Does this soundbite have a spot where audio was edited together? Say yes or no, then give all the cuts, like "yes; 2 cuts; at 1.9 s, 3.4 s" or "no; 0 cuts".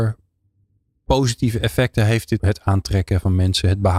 yes; 1 cut; at 2.4 s